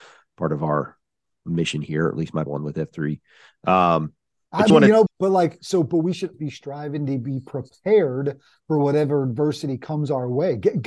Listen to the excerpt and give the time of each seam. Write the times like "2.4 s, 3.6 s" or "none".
2.5 s, 4.7 s, 5.1 s, 6.3 s